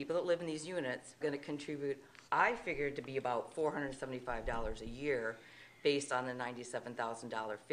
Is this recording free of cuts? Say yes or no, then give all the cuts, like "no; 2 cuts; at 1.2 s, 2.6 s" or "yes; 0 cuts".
no; 2 cuts; at 1.2 s, 2.3 s